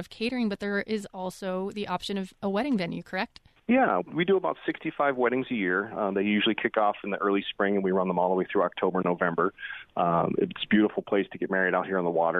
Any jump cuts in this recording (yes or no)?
yes